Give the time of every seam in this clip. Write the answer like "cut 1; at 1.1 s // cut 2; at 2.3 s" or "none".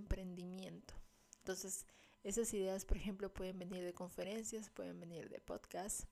cut 1; at 3.3 s